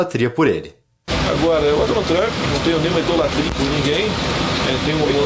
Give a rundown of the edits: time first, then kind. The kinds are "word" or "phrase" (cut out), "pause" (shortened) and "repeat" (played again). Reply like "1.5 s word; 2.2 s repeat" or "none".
1.9 s word